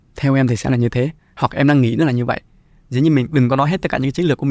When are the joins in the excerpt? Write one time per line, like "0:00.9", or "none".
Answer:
none